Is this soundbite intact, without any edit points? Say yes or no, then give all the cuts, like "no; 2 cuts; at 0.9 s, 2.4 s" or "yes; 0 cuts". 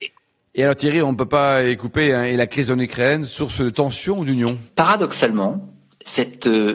no; 1 cut; at 4.7 s